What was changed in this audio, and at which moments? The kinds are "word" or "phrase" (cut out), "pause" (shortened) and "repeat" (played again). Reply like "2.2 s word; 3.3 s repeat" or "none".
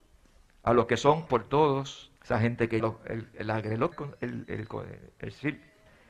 1.3 s word; 2.2 s pause; 2.8 s word; 3.3 s word; 3.9 s phrase

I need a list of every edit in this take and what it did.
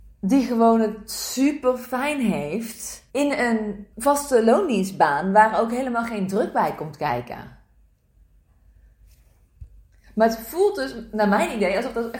3.1 s pause; 3.9 s pause

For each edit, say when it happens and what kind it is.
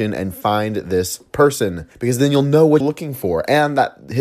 1.9 s pause; 2.8 s word

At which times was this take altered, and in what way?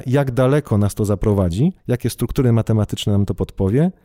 1.8 s pause

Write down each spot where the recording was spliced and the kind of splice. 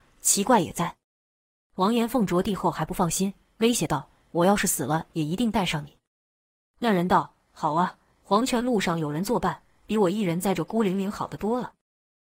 none

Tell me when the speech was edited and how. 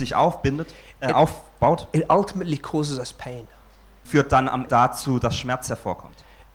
4.0 s word; 4.7 s word

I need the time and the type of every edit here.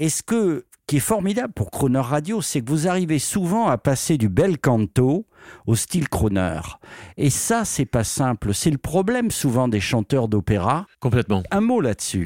10.9 s pause

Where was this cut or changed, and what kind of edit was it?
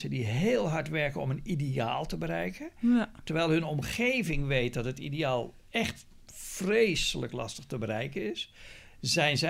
none

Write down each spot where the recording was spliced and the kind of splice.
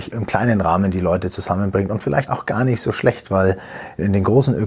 2.3 s phrase

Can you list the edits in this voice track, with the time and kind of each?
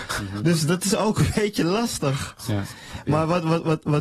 none

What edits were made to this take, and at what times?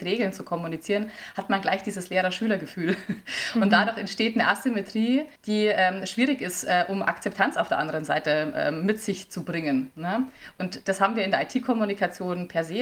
5.4 s pause

